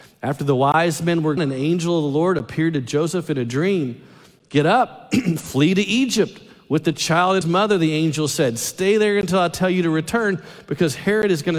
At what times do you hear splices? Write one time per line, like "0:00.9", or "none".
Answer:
0:01.4
0:07.4